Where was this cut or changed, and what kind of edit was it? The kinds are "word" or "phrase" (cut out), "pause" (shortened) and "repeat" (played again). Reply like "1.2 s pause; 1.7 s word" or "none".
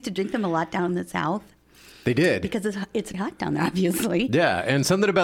3.1 s word